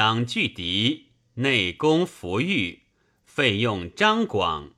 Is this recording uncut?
yes; 0 cuts

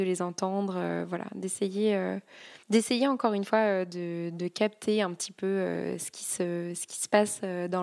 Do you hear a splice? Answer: yes; 1 cut; at 2.6 s

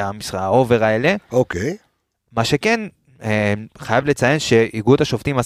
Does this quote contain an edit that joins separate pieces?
no; 0 cuts

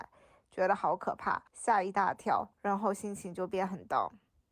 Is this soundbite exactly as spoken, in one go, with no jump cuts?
no; 2 cuts; at 1.5 s, 2.5 s

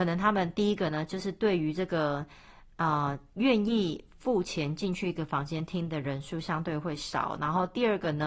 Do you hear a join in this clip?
no; 0 cuts

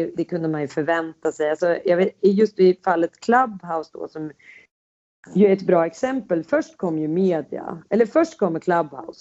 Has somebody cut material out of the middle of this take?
no; 0 cuts

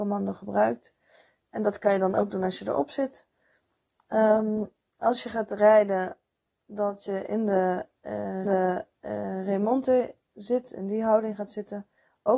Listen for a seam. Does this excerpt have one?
yes; 1 cut; at 8.5 s

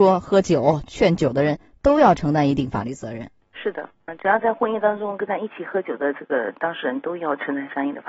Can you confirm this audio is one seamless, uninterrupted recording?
no; 1 cut; at 4.1 s

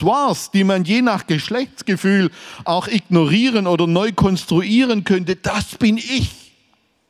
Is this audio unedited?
yes; 0 cuts

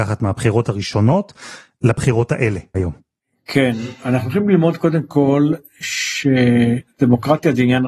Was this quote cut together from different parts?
yes; 2 cuts; at 2.7 s, 3.2 s

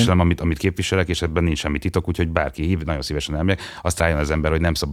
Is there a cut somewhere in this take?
yes; 1 cut; at 4.0 s

